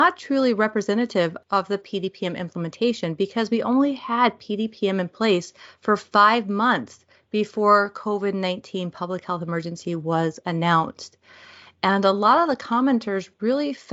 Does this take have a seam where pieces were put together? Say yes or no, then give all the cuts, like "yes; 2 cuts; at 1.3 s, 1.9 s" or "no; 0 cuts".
no; 0 cuts